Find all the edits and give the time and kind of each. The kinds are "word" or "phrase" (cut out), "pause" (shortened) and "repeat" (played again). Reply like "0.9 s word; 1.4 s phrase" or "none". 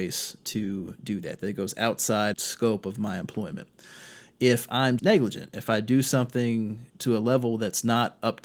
2.3 s word; 5.0 s word